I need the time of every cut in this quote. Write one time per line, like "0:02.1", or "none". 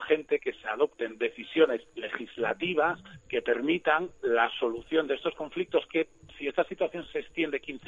0:01.9